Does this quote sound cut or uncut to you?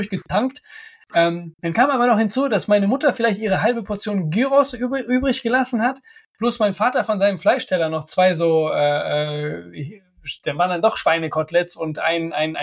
uncut